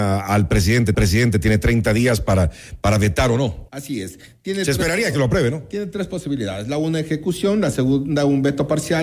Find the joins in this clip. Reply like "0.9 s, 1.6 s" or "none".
0.9 s, 3.7 s

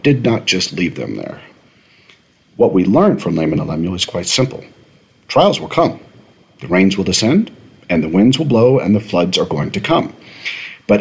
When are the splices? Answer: none

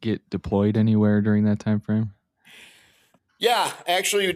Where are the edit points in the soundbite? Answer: none

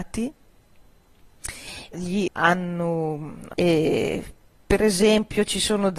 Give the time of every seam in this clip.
1.9 s, 2.3 s, 3.5 s

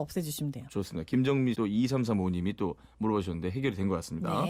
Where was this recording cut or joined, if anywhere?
1.5 s

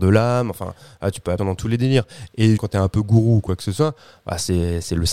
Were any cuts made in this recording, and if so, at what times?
1.4 s, 2.6 s

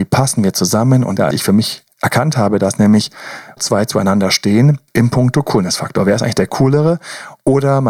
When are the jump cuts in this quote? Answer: 1.3 s, 1.9 s, 3.6 s, 4.9 s

